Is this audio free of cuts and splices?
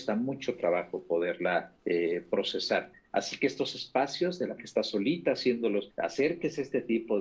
no; 3 cuts; at 1.8 s, 4.6 s, 5.9 s

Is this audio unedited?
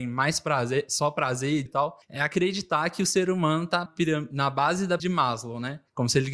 no; 3 cuts; at 1.7 s, 3.9 s, 5.0 s

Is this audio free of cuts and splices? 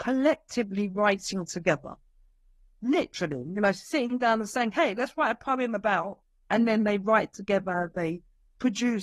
yes; 0 cuts

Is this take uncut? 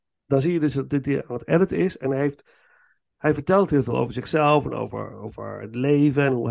yes; 0 cuts

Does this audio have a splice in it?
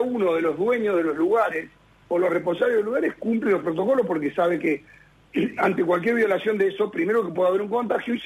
no; 0 cuts

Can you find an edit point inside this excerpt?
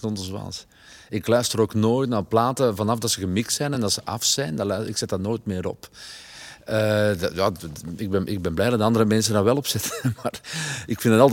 no; 0 cuts

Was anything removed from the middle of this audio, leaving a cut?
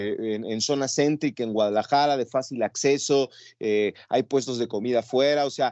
no; 0 cuts

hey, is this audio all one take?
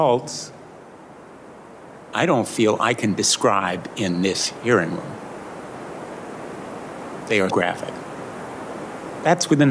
no; 1 cut; at 7.5 s

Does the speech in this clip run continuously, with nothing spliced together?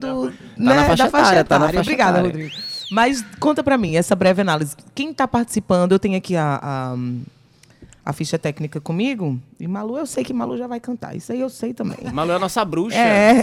yes; 0 cuts

